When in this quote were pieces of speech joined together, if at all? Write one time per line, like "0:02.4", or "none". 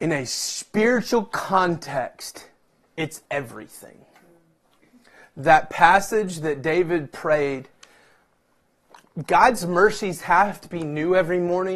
0:03.3